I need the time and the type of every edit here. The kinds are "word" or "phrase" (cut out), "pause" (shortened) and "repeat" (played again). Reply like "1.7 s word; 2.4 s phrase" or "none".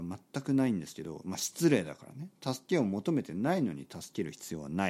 none